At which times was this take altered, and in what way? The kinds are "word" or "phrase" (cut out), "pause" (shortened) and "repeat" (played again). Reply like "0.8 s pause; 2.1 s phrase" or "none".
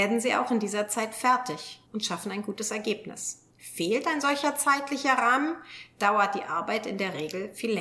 1.9 s pause; 3.5 s pause